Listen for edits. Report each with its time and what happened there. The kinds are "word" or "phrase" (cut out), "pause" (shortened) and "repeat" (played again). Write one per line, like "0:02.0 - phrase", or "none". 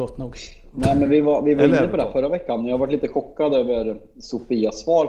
none